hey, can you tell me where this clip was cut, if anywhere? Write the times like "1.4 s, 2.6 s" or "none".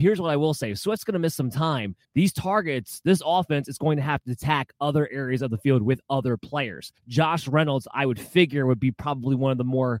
2.0 s, 7.0 s